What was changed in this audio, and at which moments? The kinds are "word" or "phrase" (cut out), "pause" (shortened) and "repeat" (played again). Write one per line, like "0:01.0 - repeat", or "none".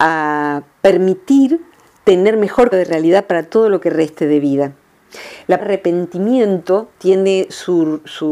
0:02.7 - word
0:05.6 - word